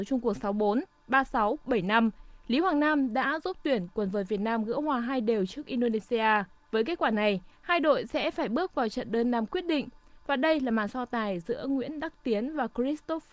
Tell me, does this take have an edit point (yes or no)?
yes